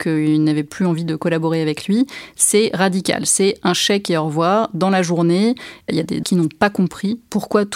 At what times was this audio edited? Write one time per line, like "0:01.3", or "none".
0:06.2